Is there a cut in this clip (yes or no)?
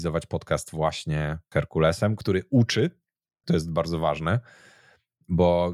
yes